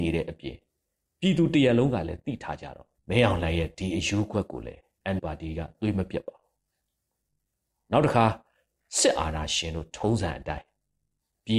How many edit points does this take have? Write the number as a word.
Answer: two